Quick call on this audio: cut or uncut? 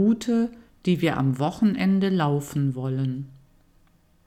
uncut